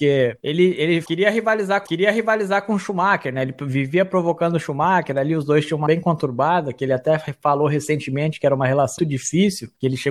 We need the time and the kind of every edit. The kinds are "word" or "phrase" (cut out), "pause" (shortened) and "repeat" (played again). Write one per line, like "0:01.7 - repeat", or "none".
0:01.9 - repeat
0:05.9 - word
0:09.0 - word